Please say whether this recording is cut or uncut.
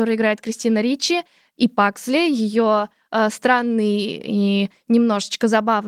uncut